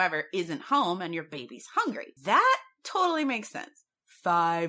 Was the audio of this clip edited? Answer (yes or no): yes